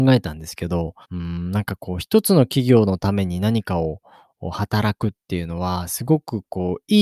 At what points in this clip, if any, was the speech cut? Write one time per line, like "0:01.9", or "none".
0:01.0